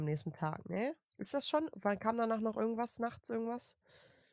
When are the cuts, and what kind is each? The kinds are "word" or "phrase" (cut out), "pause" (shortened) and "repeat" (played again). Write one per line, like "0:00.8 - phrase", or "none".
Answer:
none